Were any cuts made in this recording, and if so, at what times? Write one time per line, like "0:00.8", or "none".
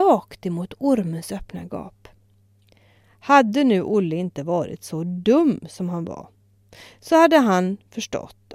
0:02.4